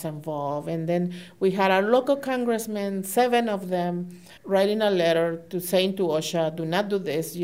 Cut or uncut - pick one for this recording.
cut